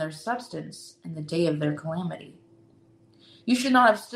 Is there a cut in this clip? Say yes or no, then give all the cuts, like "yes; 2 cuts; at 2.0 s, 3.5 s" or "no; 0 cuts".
no; 0 cuts